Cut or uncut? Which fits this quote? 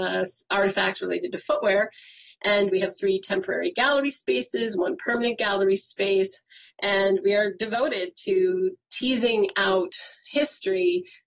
uncut